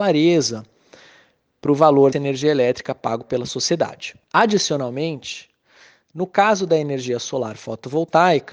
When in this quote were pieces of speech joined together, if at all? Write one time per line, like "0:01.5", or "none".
0:02.1
0:04.2